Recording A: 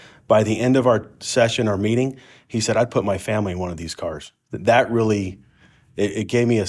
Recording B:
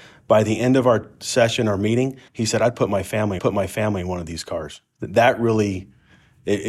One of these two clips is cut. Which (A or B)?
B